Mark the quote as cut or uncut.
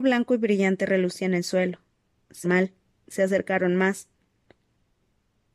cut